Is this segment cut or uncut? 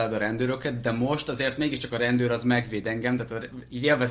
uncut